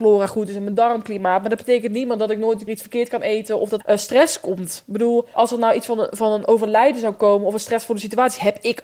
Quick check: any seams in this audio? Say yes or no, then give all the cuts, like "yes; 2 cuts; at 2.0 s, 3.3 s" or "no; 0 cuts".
yes; 3 cuts; at 2.7 s, 3.8 s, 5.3 s